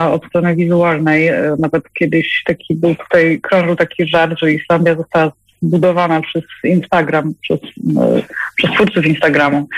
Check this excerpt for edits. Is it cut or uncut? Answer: uncut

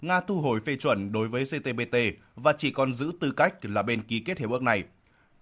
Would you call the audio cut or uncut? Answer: uncut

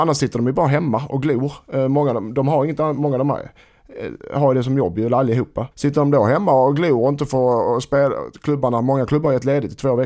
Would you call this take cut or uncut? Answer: cut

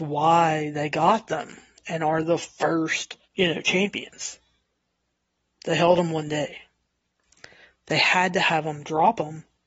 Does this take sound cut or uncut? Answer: cut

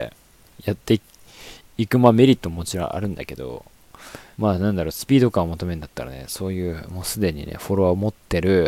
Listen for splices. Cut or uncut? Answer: cut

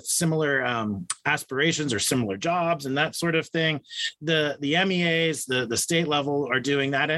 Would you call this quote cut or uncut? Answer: uncut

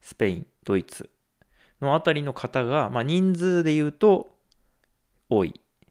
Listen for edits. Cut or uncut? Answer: uncut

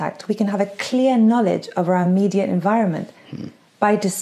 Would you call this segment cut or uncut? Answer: uncut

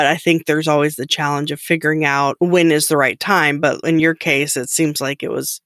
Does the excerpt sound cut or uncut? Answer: uncut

